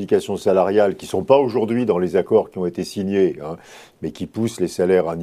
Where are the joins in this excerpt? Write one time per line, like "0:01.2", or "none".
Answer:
none